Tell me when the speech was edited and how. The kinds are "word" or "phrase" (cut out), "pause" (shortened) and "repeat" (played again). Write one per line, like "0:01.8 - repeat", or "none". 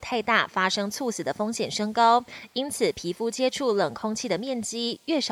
none